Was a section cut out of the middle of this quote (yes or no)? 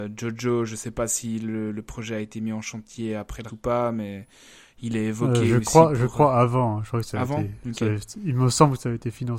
yes